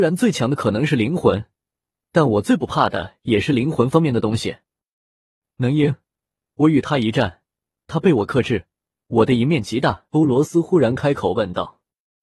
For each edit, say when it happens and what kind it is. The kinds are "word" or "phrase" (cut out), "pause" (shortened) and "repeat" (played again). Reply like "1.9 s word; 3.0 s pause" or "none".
10.1 s pause